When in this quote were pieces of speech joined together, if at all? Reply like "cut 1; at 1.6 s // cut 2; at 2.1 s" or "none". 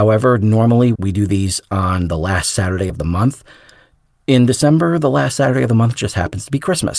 none